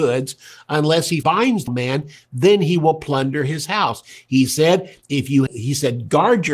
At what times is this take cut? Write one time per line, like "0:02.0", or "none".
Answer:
0:01.2
0:01.7
0:05.5